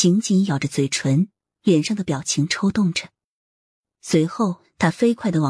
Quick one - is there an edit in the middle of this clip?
no; 0 cuts

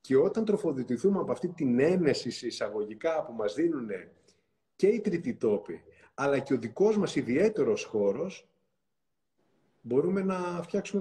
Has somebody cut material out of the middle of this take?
no; 0 cuts

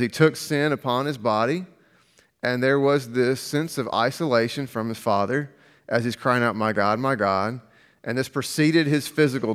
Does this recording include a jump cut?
no; 0 cuts

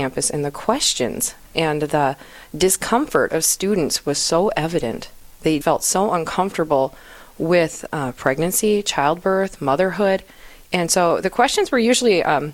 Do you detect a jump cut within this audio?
yes; 1 cut; at 5.6 s

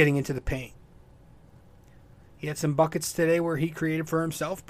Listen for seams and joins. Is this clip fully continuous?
yes; 0 cuts

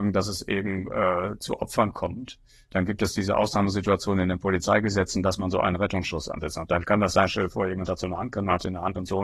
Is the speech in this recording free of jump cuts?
yes; 0 cuts

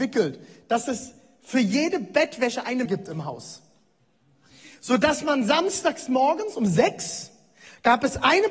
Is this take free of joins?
no; 1 cut; at 2.9 s

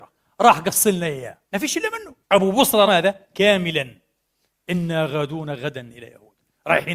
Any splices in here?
yes; 3 cuts; at 1.4 s, 2.2 s, 2.9 s

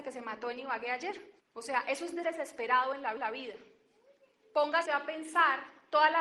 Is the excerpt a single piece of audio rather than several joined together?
no; 4 cuts; at 1.4 s, 2.2 s, 3.2 s, 4.9 s

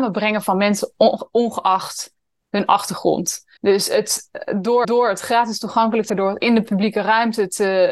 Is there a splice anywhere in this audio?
yes; 3 cuts; at 3.6 s, 4.8 s, 6.1 s

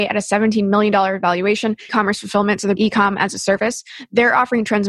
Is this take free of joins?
no; 2 cuts; at 1.9 s, 2.8 s

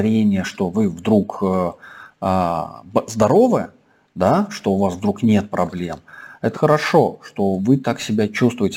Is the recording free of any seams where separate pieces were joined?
no; 1 cut; at 6.5 s

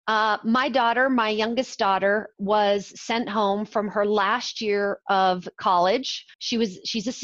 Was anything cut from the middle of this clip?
yes; 1 cut; at 6.3 s

